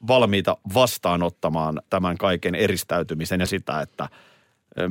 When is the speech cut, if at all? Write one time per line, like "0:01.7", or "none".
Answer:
0:01.9
0:03.5